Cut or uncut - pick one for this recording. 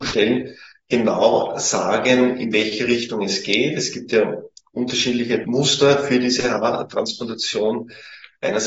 uncut